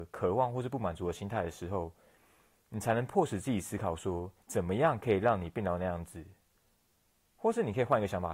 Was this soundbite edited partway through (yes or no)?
yes